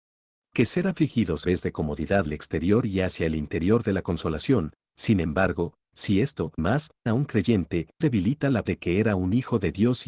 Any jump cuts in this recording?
yes; 6 cuts; at 1.4 s, 2.3 s, 6.6 s, 7.1 s, 8.0 s, 8.7 s

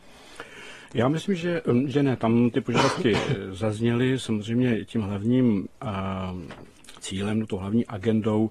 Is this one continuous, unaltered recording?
yes; 0 cuts

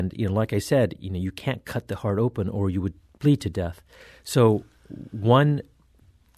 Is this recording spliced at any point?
no; 0 cuts

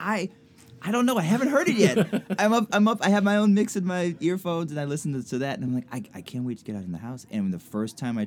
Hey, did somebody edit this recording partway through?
no; 0 cuts

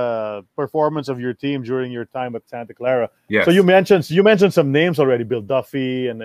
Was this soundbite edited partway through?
yes; 1 cut; at 3.2 s

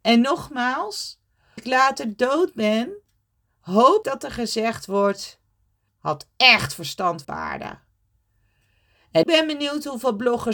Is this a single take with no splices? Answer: no; 5 cuts; at 1.6 s, 4.0 s, 5.9 s, 7.2 s, 9.2 s

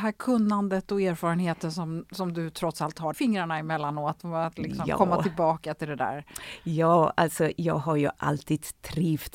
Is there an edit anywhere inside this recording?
yes; 1 cut; at 3.1 s

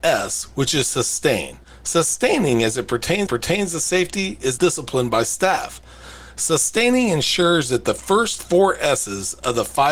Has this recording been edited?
yes; 3 cuts; at 1.6 s, 3.3 s, 4.6 s

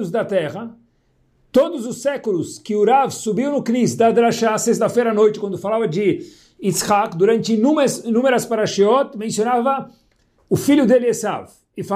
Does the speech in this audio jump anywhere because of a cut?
no; 0 cuts

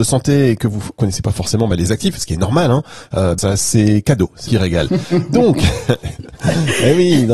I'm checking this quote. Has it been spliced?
yes; 2 cuts; at 3.4 s, 4.5 s

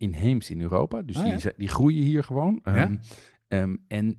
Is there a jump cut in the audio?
no; 0 cuts

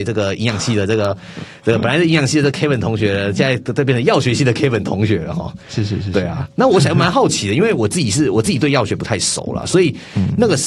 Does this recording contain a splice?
no; 0 cuts

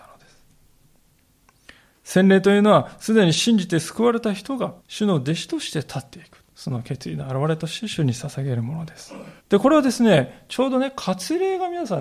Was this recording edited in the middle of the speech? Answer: yes; 3 cuts; at 4.8 s, 6.5 s, 9.4 s

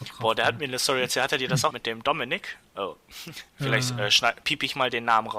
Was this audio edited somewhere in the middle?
yes; 3 cuts; at 1.7 s, 3.5 s, 4.4 s

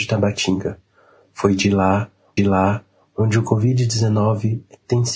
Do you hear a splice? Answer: yes; 1 cut; at 2.4 s

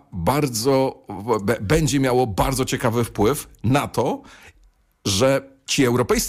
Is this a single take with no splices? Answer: yes; 0 cuts

